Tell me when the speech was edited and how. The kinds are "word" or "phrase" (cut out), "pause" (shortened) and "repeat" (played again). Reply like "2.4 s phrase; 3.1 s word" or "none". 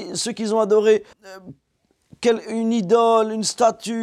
1.1 s pause